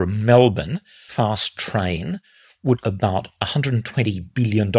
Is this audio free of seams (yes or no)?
no